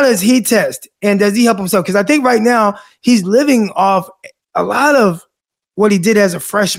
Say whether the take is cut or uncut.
uncut